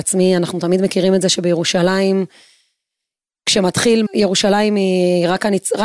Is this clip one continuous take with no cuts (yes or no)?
no